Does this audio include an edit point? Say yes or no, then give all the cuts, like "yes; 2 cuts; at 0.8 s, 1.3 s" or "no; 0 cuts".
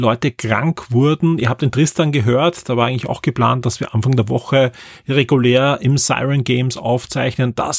no; 0 cuts